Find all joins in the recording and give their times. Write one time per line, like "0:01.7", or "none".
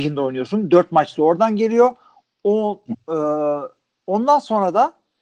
none

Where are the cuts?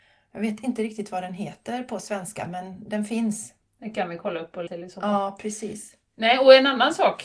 0:04.7

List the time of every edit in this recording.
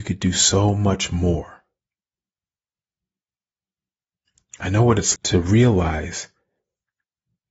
0:05.1

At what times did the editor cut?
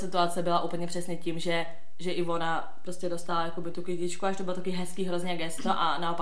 none

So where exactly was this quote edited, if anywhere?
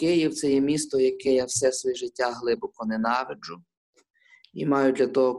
none

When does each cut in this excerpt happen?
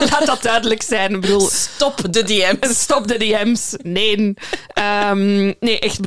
none

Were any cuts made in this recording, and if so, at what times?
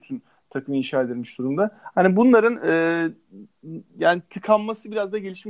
none

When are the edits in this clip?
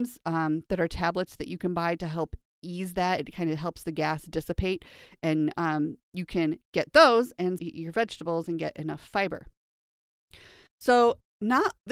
0:07.6

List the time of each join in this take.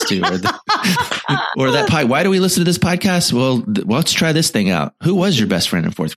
0:01.5

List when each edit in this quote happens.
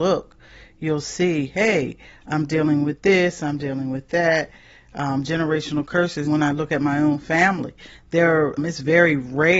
0:06.3
0:08.6

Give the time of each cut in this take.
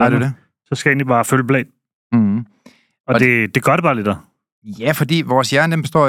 none

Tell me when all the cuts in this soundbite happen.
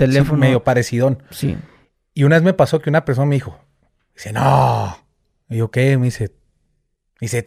none

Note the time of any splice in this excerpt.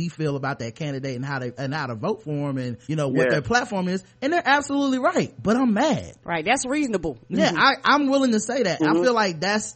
0:02.8

